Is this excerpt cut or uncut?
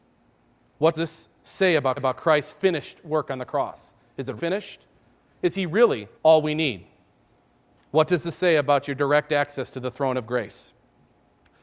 cut